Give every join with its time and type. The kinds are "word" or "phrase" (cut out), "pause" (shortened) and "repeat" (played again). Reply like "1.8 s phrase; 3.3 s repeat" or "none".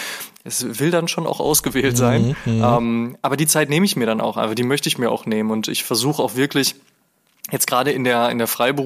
none